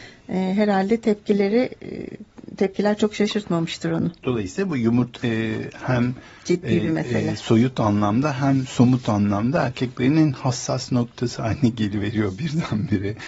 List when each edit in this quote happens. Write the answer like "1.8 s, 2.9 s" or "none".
5.2 s